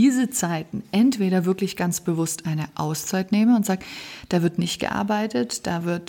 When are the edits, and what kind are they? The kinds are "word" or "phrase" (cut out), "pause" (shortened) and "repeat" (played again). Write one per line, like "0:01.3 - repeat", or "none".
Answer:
none